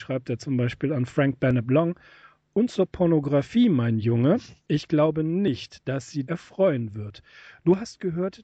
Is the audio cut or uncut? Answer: cut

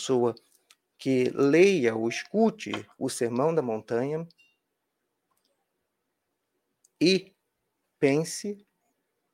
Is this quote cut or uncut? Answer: uncut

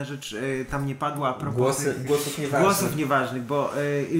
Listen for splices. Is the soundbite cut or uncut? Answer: cut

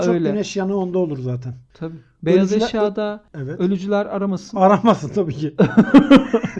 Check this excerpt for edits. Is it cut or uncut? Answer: uncut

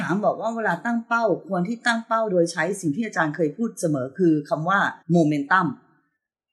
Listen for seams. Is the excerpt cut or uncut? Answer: cut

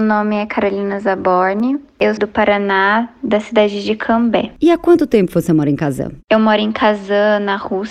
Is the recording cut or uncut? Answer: cut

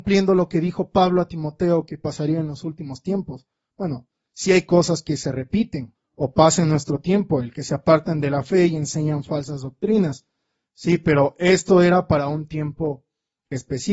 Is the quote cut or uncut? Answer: uncut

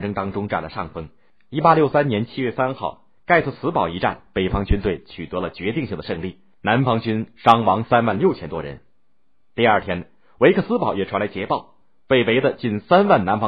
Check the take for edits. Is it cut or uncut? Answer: uncut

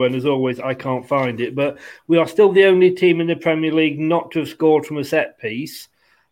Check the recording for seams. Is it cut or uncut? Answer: uncut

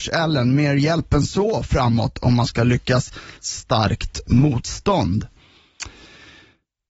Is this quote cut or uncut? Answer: cut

